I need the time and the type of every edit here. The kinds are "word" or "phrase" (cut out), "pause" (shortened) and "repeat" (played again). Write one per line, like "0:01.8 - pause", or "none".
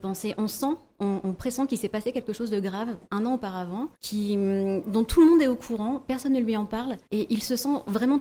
0:03.0 - pause
0:03.9 - pause
0:07.0 - pause